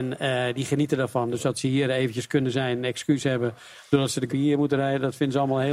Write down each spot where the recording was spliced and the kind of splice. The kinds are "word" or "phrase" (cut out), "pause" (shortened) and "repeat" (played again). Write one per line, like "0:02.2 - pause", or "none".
0:04.3 - word